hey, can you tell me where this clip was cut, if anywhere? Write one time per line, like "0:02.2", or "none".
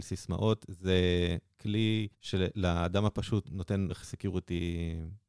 0:02.1
0:03.4
0:03.9